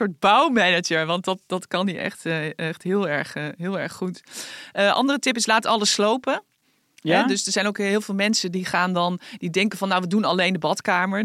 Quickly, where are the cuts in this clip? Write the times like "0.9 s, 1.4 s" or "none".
none